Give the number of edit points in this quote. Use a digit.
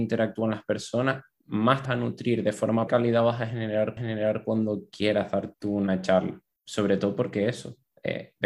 5